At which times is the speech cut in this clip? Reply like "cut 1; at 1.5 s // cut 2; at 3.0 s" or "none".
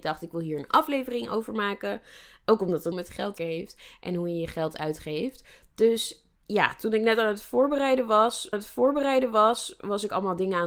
cut 1; at 2.9 s // cut 2; at 3.4 s // cut 3; at 6.3 s // cut 4; at 8.5 s